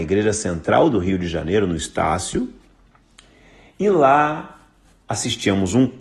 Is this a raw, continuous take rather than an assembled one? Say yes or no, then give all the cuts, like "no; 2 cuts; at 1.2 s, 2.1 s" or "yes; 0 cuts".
yes; 0 cuts